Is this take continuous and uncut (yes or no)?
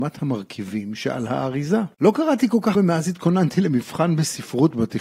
no